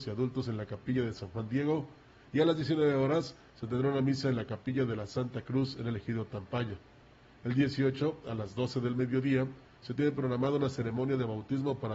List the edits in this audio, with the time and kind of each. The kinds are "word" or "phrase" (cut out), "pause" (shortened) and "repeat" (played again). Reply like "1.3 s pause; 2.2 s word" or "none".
none